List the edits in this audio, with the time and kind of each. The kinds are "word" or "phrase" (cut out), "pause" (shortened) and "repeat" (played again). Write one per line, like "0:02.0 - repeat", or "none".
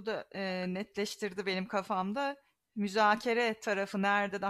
none